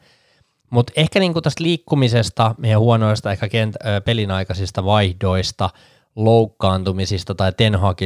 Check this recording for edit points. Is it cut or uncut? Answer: uncut